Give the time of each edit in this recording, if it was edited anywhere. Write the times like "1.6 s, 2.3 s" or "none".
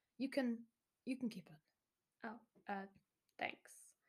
none